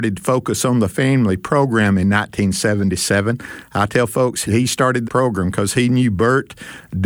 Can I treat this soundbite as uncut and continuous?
no; 2 cuts; at 4.4 s, 5.0 s

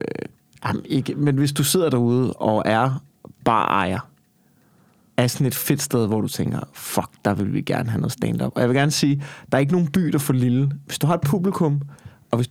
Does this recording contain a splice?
no; 0 cuts

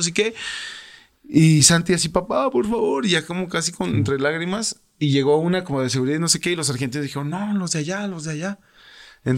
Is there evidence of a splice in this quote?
no; 0 cuts

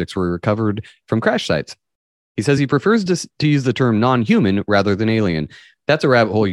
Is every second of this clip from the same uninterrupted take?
yes; 0 cuts

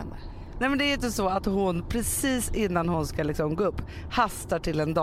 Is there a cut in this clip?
no; 0 cuts

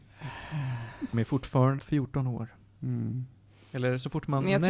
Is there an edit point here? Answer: yes; 2 cuts; at 1.1 s, 1.8 s

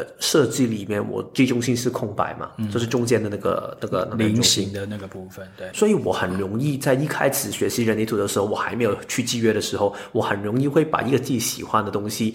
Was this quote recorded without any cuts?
no; 1 cut; at 5.7 s

